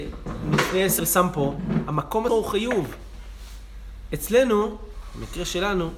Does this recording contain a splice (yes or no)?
yes